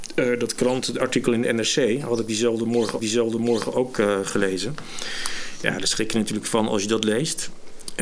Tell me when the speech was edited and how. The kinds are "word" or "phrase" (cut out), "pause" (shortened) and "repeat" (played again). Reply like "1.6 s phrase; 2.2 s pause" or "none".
3.0 s repeat